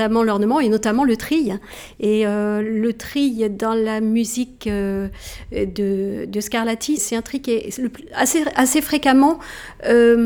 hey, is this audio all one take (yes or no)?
no